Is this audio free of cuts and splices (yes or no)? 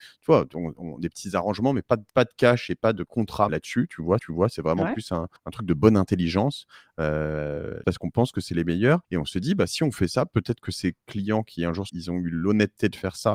no